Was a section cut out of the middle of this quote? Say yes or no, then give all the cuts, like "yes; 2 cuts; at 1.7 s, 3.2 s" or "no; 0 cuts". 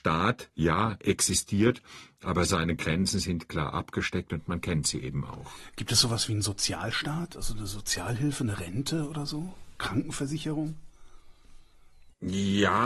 no; 0 cuts